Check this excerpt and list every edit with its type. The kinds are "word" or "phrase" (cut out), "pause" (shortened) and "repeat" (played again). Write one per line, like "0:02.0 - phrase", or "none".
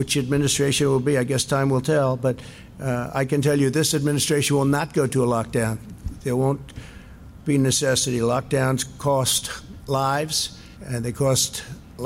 0:10.8 - pause